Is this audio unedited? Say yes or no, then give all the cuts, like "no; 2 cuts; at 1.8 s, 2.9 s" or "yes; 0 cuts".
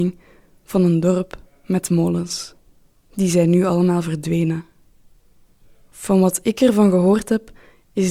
no; 2 cuts; at 2.8 s, 5.6 s